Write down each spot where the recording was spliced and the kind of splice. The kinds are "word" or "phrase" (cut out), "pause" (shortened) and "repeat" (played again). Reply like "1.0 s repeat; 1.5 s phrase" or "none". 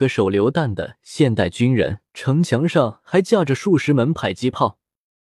2.1 s pause